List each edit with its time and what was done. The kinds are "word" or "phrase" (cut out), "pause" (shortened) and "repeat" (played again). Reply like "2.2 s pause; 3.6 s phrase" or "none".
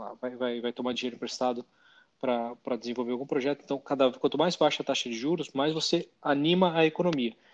none